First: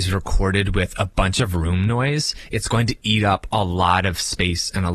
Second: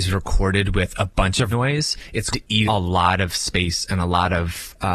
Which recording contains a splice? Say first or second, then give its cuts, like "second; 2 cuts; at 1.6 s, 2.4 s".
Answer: second; 3 cuts; at 1.5 s, 2.3 s, 2.7 s